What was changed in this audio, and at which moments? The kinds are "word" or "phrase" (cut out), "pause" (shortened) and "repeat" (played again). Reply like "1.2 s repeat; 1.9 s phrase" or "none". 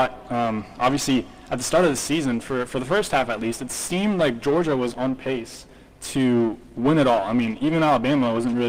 none